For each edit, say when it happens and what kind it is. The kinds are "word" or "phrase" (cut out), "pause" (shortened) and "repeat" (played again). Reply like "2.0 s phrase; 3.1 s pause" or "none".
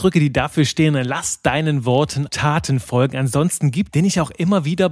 2.3 s word; 3.9 s phrase